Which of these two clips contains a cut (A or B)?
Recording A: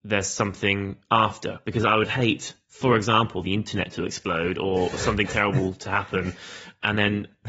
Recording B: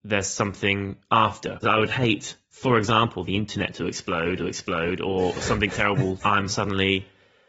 B